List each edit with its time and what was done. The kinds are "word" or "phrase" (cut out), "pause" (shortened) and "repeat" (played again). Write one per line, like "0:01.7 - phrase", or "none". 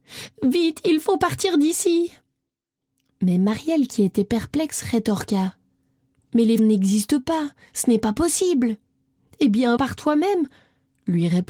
0:06.6 - word
0:09.8 - word